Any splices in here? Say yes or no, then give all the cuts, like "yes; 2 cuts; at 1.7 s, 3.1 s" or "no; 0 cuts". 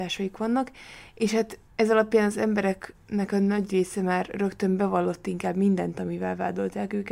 yes; 1 cut; at 1.7 s